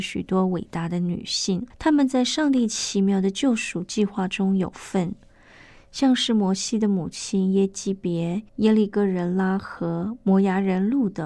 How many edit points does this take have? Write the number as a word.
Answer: two